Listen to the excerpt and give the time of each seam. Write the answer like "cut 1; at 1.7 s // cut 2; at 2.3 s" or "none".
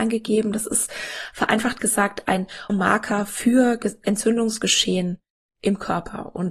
cut 1; at 2.7 s

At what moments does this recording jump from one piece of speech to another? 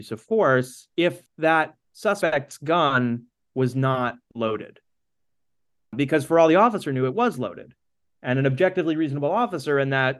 cut 1; at 0.9 s

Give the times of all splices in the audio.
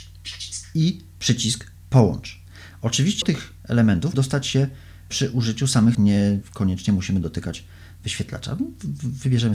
cut 1; at 3.2 s // cut 2; at 4.1 s // cut 3; at 5.9 s

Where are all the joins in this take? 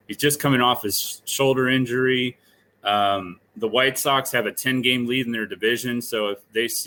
none

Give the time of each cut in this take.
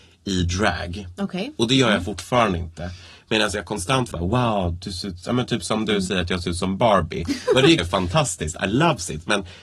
cut 1; at 4.1 s // cut 2; at 7.8 s

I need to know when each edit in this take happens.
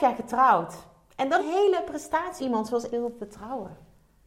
cut 1; at 1.4 s // cut 2; at 2.4 s // cut 3; at 2.9 s

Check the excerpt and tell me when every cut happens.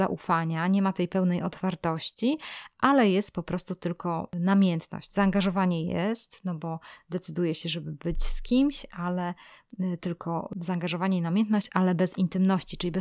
none

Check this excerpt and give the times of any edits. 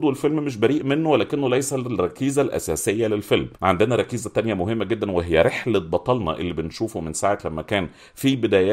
cut 1; at 3.5 s

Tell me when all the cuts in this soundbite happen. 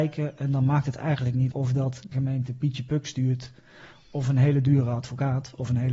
cut 1; at 1.5 s // cut 2; at 2.1 s

